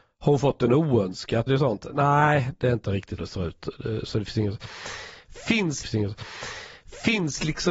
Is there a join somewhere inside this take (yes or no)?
yes